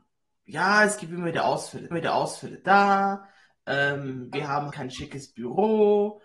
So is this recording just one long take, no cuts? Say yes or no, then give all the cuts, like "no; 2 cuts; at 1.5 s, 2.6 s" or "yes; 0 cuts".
no; 3 cuts; at 1.9 s, 4.3 s, 4.7 s